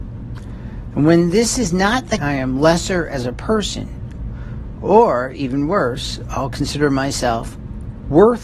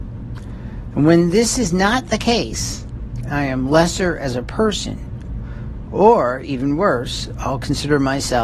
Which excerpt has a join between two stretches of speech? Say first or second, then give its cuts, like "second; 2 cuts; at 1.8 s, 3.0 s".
first; 1 cut; at 2.2 s